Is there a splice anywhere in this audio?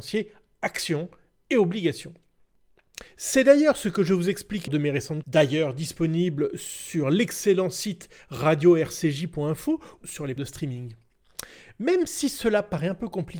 yes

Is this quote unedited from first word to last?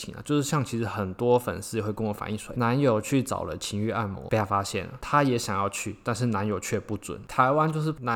no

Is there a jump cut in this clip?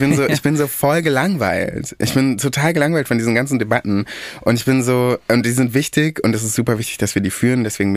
no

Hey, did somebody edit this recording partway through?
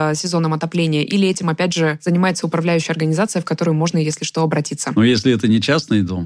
no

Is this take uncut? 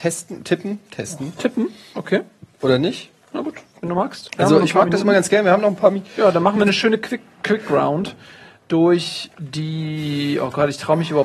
yes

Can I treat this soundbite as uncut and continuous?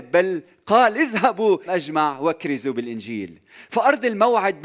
no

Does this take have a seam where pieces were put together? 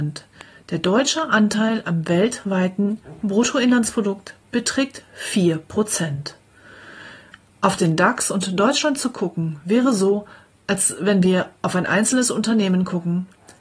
no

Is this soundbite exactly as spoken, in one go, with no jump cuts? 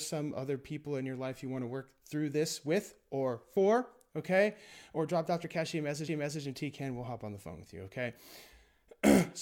no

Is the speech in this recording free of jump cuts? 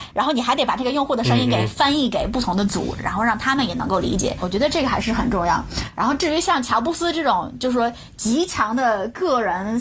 no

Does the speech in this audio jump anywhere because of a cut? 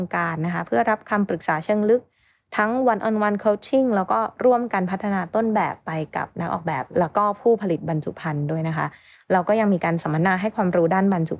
no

